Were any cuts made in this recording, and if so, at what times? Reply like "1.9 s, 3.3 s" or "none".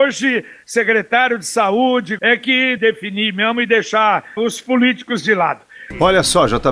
2.2 s, 2.8 s, 4.4 s